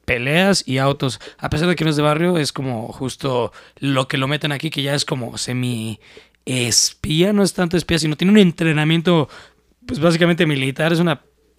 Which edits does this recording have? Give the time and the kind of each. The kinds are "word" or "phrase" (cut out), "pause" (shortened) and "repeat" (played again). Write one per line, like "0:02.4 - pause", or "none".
none